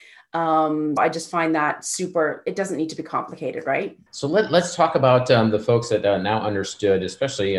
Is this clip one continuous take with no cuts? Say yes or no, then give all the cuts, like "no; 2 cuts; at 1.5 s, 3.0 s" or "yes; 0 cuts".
no; 2 cuts; at 1.0 s, 4.1 s